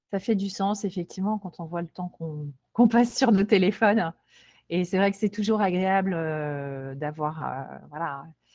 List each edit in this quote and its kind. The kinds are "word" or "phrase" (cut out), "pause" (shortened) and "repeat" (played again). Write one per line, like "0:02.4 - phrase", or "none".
none